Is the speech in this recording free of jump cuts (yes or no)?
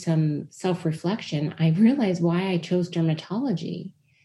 yes